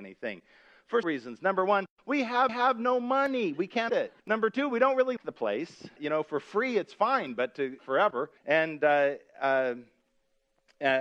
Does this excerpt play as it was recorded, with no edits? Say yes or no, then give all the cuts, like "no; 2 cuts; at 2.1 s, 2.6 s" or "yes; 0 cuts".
no; 8 cuts; at 1.0 s, 2.5 s, 3.9 s, 4.2 s, 5.2 s, 6.0 s, 7.8 s, 8.4 s